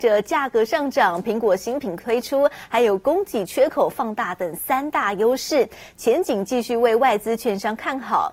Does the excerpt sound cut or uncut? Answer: uncut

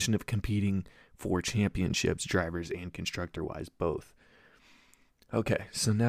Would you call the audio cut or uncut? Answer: uncut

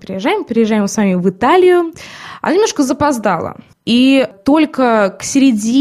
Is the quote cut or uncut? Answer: cut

